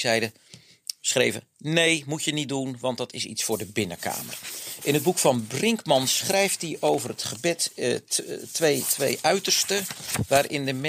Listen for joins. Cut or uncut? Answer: uncut